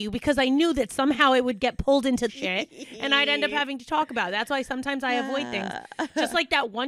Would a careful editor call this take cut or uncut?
cut